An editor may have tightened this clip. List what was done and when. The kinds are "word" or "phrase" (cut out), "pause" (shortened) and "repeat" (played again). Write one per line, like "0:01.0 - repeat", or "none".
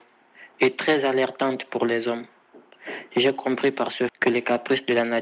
0:04.1 - word